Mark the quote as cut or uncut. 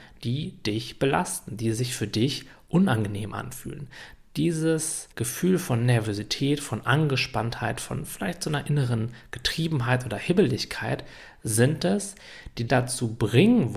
cut